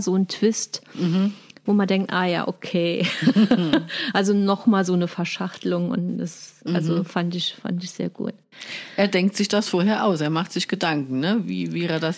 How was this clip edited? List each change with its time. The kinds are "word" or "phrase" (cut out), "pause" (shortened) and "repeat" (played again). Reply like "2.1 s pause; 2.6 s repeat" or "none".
none